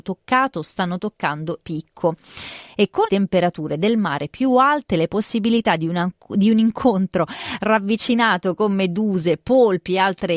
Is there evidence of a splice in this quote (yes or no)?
yes